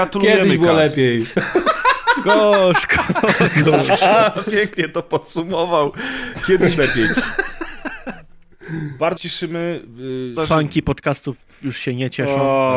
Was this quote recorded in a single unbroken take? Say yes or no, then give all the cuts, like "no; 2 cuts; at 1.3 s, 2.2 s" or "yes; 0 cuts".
no; 4 cuts; at 3.6 s, 6.8 s, 9.2 s, 10.4 s